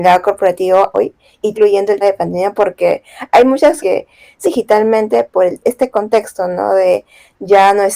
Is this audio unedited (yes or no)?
no